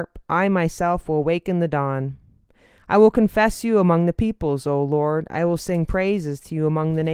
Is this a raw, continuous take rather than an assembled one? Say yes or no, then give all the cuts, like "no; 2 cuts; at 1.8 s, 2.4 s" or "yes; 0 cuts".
yes; 0 cuts